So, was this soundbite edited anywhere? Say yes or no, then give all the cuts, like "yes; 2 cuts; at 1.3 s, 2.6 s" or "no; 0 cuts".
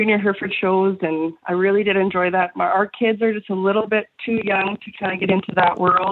no; 0 cuts